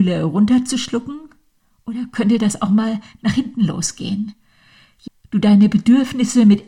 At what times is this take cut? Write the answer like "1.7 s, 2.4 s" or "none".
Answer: 5.1 s